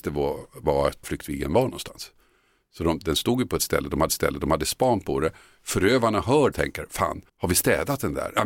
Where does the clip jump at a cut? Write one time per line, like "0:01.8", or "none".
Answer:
0:01.0
0:04.1
0:06.5
0:07.3

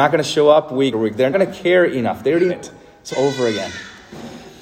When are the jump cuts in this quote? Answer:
0:00.9
0:01.3
0:02.5
0:03.1

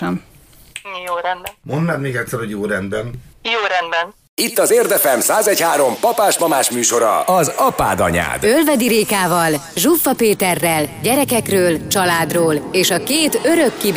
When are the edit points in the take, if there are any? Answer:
none

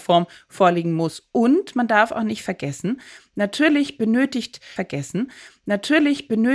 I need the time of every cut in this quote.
0:04.8

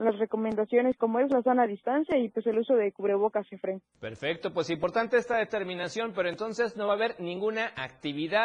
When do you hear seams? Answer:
0:03.9

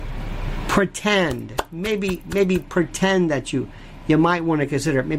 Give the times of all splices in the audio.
none

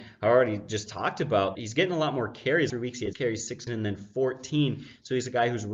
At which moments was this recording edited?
0:01.5
0:02.7
0:03.1
0:03.7

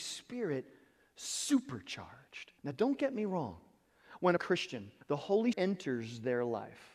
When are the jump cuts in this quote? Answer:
0:02.6
0:04.4
0:05.0
0:05.5

